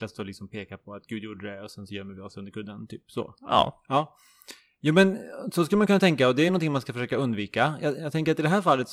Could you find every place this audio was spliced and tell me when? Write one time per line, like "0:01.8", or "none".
none